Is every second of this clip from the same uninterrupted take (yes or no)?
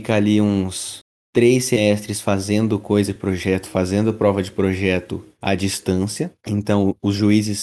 yes